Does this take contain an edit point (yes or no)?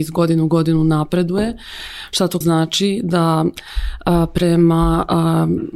yes